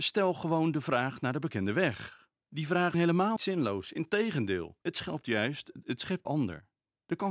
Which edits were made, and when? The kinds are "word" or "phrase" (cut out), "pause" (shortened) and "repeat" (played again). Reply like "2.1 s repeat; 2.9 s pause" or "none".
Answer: 2.4 s pause; 2.9 s word; 3.4 s word; 4.8 s pause; 6.2 s phrase